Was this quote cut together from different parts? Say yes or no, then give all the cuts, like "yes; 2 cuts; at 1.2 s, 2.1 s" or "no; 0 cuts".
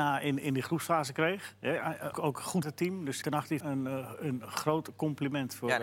yes; 4 cuts; at 2.1 s, 2.6 s, 3.2 s, 3.6 s